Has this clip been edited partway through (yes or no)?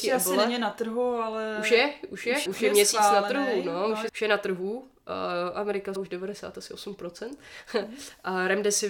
yes